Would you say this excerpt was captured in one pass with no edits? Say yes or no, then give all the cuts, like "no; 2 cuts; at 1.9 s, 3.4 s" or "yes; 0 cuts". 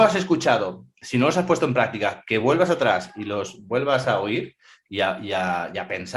yes; 0 cuts